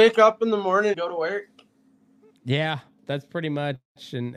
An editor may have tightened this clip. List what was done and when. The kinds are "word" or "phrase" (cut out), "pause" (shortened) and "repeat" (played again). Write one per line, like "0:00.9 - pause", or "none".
0:00.9 - word
0:03.0 - word